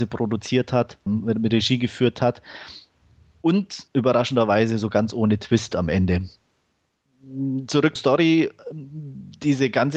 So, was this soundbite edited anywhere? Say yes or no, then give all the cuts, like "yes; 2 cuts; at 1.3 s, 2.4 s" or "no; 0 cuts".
yes; 3 cuts; at 1.1 s, 3.9 s, 8.0 s